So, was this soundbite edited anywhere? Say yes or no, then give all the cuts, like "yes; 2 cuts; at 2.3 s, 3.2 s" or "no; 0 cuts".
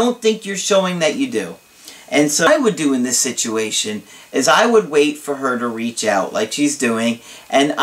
no; 0 cuts